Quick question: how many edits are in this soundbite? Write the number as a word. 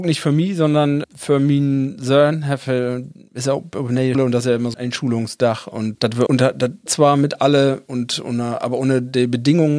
six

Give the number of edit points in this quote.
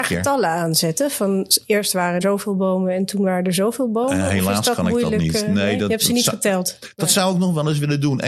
one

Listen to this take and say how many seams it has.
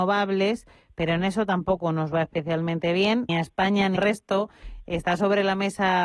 two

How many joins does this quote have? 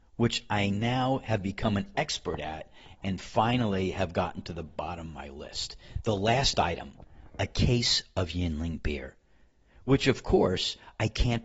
zero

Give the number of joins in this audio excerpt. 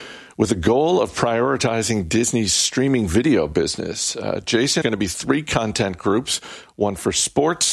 one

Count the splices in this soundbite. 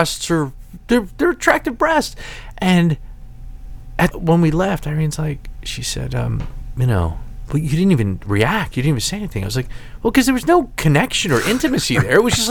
one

